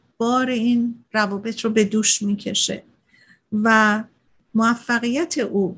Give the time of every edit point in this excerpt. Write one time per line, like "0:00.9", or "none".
none